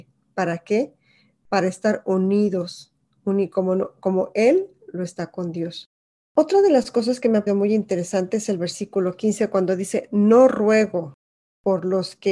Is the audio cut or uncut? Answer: cut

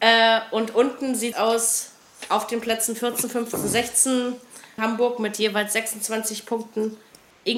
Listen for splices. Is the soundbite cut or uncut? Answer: cut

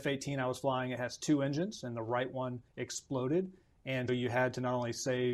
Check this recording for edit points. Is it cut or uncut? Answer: cut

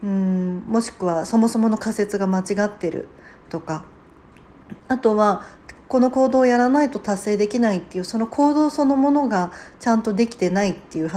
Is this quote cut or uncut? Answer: uncut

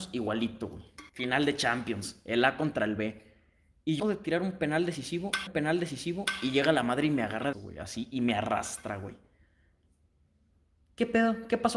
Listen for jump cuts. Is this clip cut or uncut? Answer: cut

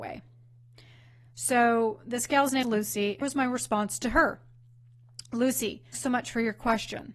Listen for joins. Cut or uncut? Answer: cut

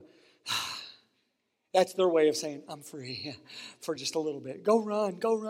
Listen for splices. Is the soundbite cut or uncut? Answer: uncut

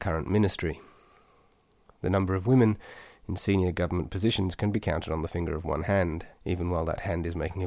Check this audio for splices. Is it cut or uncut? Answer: cut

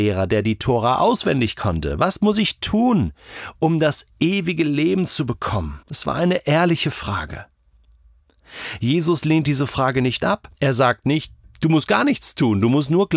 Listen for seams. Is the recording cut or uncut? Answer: cut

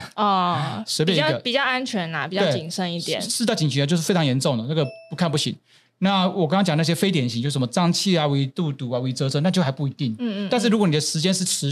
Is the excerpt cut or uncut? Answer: uncut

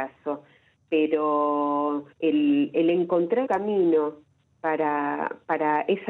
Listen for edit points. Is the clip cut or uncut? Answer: cut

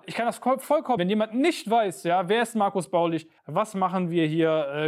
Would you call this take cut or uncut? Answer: cut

